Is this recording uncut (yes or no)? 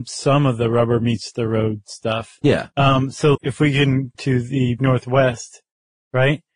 no